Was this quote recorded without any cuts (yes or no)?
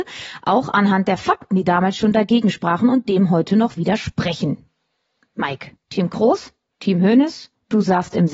yes